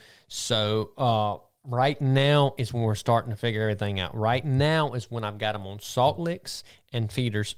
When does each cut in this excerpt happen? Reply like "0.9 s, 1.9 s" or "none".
none

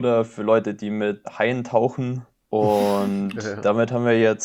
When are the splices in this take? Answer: 1.2 s

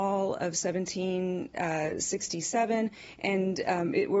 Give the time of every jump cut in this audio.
none

